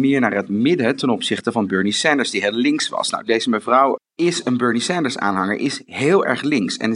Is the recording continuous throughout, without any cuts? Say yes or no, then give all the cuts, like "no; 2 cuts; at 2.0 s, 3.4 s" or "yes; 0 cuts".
no; 1 cut; at 4.0 s